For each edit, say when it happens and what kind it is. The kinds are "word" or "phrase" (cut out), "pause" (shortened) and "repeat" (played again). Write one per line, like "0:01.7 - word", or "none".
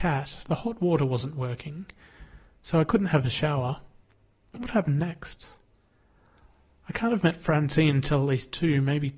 none